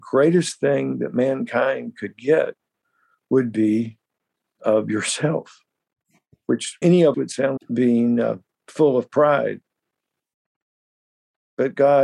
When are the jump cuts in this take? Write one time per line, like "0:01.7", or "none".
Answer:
0:04.6
0:06.8
0:07.1
0:07.6